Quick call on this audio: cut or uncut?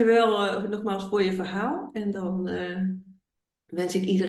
uncut